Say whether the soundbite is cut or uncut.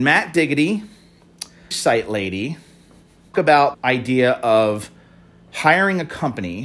cut